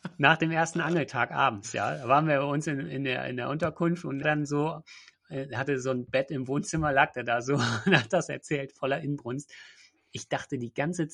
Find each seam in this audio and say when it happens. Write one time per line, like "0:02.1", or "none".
0:04.2